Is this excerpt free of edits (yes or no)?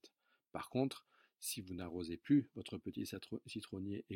yes